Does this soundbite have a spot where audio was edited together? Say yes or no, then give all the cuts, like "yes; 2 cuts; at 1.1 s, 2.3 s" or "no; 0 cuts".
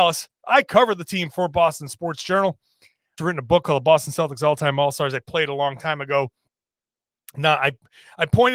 yes; 1 cut; at 3.2 s